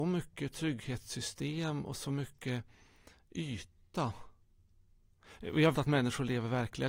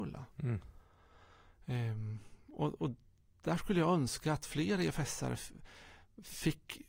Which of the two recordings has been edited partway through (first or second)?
first